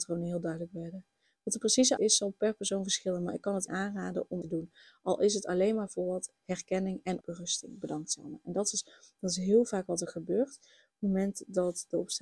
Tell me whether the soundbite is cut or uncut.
cut